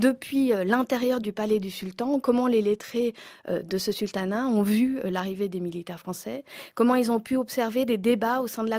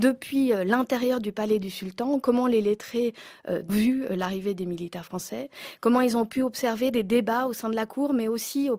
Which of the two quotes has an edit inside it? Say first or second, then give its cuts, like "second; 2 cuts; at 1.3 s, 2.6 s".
second; 1 cut; at 3.7 s